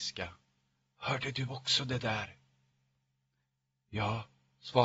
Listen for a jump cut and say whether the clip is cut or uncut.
uncut